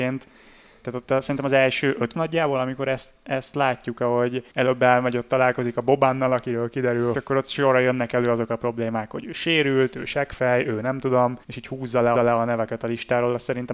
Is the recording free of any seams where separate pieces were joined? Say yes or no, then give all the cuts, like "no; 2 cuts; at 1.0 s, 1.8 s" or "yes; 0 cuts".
no; 5 cuts; at 2.1 s, 4.5 s, 7.1 s, 11.4 s, 12.1 s